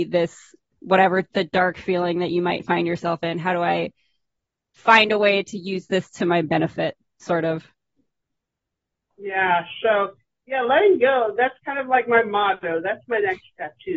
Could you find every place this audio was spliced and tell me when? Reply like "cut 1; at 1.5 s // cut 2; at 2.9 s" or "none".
none